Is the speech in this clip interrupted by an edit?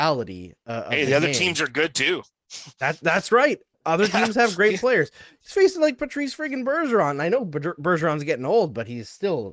no; 0 cuts

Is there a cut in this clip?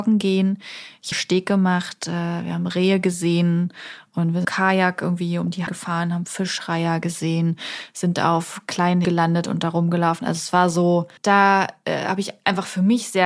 yes; 5 cuts; at 1.1 s, 4.4 s, 5.7 s, 9.0 s, 11.2 s

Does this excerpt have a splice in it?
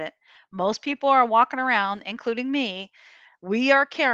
no; 0 cuts

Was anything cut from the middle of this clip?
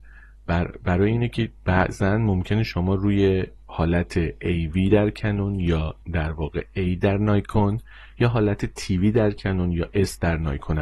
yes; 2 cuts; at 3.6 s, 6.0 s

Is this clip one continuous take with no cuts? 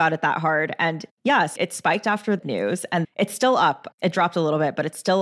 no; 3 cuts; at 1.6 s, 2.4 s, 3.0 s

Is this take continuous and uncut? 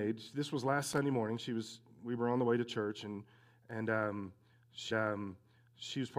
no; 1 cut; at 4.9 s

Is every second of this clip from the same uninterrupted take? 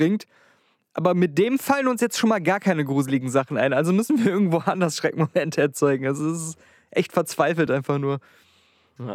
yes; 0 cuts

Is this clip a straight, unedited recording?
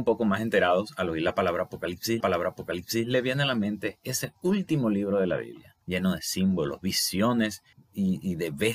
no; 3 cuts; at 2.2 s, 5.8 s, 7.7 s

